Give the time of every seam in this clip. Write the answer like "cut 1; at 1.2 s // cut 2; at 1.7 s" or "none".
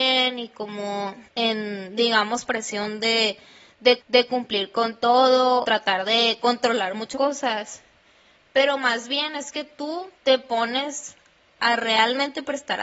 cut 1; at 1.3 s // cut 2; at 2.5 s // cut 3; at 4.0 s // cut 4; at 5.6 s // cut 5; at 7.1 s // cut 6; at 10.1 s